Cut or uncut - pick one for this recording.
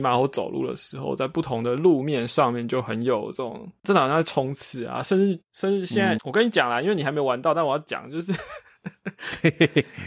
cut